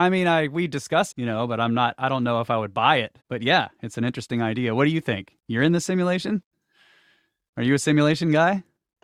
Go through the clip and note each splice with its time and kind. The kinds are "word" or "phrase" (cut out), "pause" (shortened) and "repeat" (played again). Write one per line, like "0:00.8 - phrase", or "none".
0:01.1 - word
0:03.2 - pause